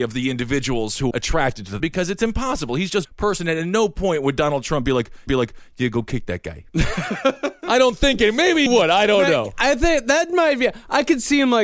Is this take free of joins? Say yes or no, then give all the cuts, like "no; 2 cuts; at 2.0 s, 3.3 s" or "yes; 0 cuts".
no; 5 cuts; at 1.1 s, 1.8 s, 3.0 s, 5.3 s, 8.7 s